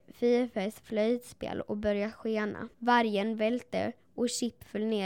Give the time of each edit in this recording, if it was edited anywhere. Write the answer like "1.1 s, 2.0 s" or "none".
2.7 s